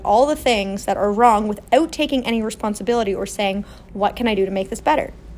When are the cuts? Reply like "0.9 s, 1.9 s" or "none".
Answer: none

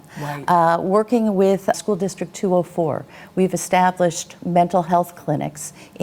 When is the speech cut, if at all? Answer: 1.7 s

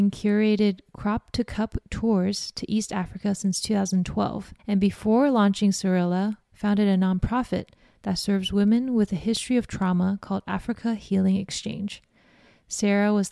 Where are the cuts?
4.6 s

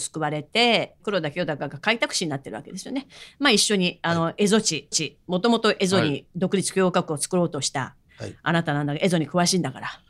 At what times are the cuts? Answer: 4.9 s

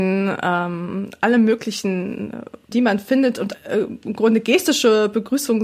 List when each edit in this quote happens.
2.7 s, 3.5 s

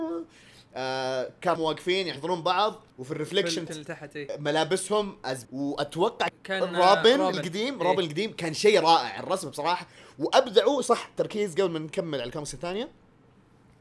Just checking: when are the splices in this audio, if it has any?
1.6 s, 2.9 s, 3.7 s, 5.4 s, 6.3 s

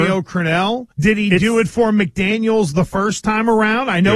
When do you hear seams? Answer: 0.9 s

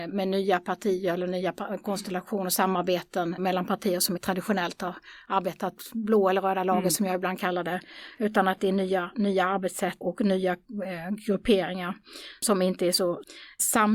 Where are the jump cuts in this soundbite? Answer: 3.4 s, 4.2 s, 10.0 s

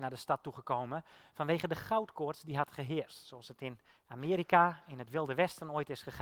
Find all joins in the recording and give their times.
none

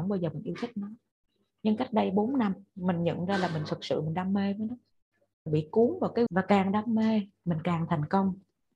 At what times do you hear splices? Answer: 5.5 s, 6.3 s

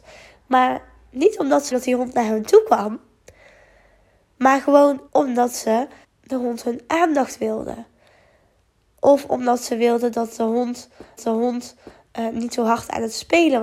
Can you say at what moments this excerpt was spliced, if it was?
1.7 s, 5.1 s, 6.0 s, 11.2 s

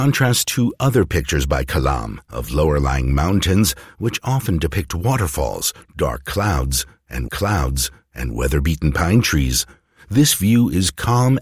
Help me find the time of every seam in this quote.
7.3 s

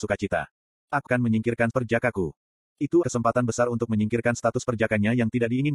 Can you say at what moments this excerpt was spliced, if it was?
1.1 s, 1.7 s, 3.0 s

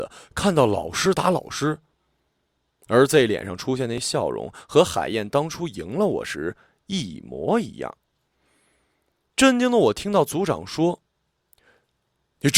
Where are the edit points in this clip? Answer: none

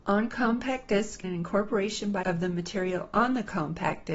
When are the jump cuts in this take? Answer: 1.2 s, 2.2 s

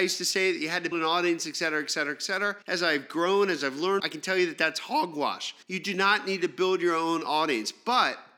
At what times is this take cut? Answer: 0.9 s, 2.6 s, 4.0 s, 5.6 s

